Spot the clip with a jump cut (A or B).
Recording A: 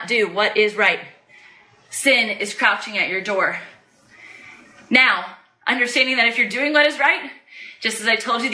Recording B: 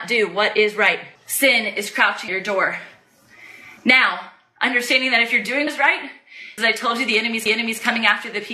B